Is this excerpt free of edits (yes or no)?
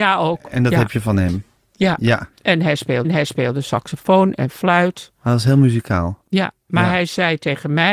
no